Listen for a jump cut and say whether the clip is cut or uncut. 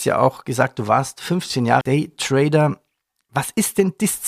cut